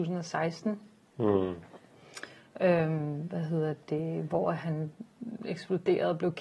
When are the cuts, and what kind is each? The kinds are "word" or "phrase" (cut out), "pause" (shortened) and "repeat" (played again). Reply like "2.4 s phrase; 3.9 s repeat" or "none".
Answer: none

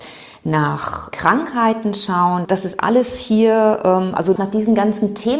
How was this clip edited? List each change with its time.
4.4 s word

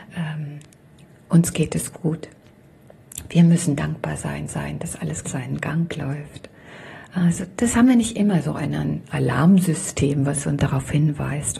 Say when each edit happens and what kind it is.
4.5 s repeat; 5.2 s phrase; 10.6 s word

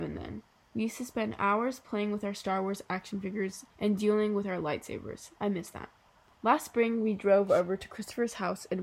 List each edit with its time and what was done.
3.7 s pause; 5.4 s pause; 6.0 s pause

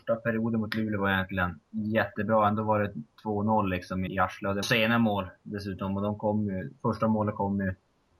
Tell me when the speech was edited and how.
1.7 s pause; 4.1 s word; 4.6 s phrase

